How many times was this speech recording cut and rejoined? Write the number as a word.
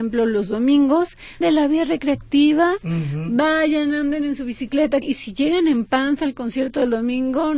two